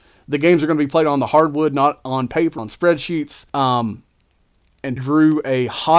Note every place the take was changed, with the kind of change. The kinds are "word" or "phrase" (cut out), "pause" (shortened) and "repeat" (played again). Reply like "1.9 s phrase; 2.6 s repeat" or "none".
2.6 s word; 3.5 s pause; 5.0 s word